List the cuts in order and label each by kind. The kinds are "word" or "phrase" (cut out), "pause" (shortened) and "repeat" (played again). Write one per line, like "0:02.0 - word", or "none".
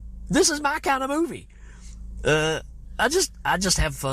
none